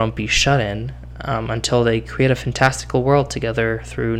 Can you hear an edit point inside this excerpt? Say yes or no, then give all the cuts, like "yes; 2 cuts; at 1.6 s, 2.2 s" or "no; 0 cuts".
no; 0 cuts